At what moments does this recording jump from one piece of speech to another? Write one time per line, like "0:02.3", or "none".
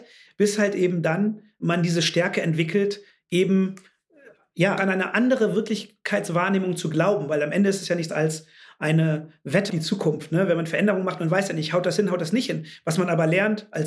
0:01.6
0:04.8
0:08.1
0:09.7